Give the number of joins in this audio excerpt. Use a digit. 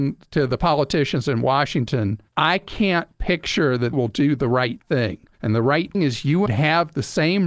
5